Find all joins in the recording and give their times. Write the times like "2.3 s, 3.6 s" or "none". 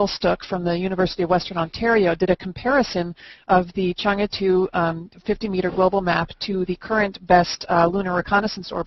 none